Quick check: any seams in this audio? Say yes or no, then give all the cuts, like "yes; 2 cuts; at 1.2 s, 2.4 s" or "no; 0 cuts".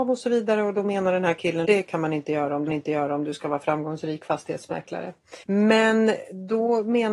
yes; 3 cuts; at 1.6 s, 2.7 s, 5.4 s